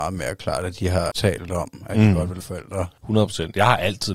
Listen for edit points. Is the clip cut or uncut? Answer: cut